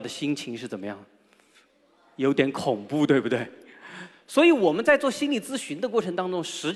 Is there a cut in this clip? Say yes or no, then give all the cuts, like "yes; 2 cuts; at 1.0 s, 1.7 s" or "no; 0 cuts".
no; 0 cuts